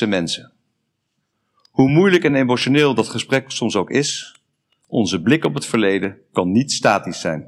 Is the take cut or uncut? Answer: uncut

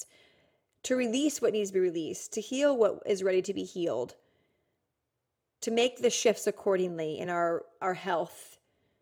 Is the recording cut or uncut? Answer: uncut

